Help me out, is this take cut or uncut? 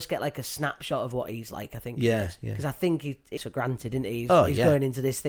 cut